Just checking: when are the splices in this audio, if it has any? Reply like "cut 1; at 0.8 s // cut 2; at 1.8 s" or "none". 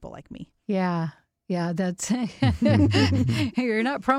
none